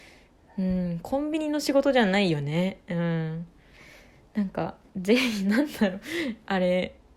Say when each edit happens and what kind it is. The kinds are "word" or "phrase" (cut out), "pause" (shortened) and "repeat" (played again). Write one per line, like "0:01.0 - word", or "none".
none